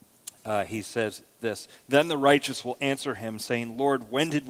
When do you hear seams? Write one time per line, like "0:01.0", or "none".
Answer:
none

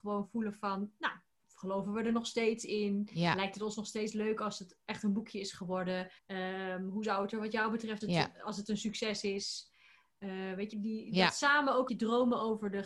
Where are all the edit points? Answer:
0:06.2
0:08.0
0:10.7
0:11.9

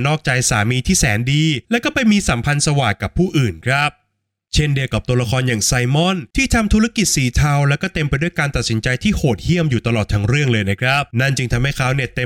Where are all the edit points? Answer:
0:01.6
0:06.3
0:11.1

